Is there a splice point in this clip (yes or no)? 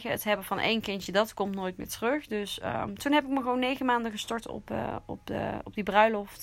no